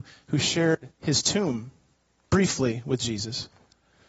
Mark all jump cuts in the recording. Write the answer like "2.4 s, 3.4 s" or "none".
0.9 s, 1.9 s